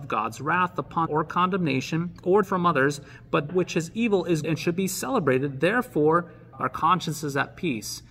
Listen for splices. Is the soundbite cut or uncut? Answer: cut